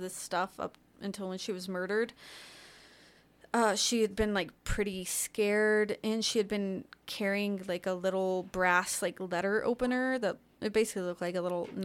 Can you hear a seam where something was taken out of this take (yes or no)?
no